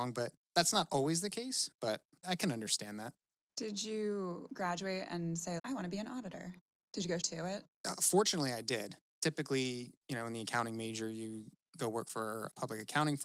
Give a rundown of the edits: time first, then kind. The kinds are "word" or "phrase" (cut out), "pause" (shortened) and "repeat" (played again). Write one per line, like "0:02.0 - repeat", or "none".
0:02.2 - word
0:05.6 - word
0:07.2 - word